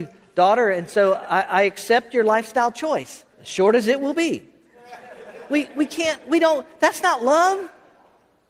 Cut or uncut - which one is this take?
cut